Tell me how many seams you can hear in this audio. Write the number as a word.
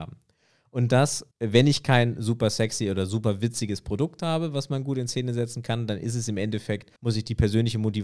two